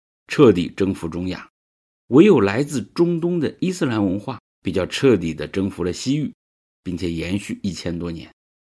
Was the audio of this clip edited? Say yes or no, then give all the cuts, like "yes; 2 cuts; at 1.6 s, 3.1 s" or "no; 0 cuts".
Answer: no; 0 cuts